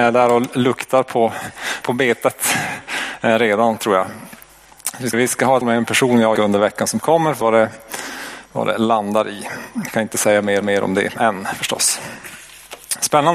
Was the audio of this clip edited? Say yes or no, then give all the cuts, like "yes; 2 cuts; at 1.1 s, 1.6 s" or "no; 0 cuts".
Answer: yes; 6 cuts; at 1.8 s, 5.1 s, 5.6 s, 6.4 s, 7.4 s, 10.6 s